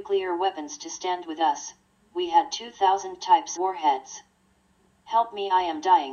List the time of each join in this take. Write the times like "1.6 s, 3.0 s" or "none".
3.2 s, 3.6 s